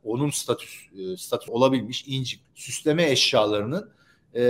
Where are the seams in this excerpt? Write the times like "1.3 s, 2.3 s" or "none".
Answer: 1.5 s, 2.4 s